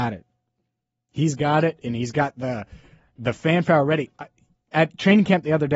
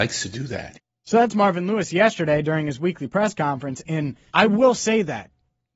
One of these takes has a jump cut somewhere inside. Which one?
second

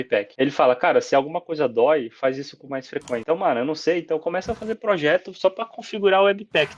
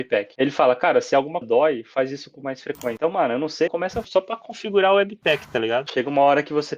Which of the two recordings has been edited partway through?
second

